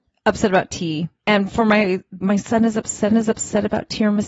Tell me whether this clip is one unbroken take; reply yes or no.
no